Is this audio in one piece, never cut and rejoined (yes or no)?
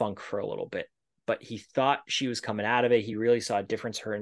yes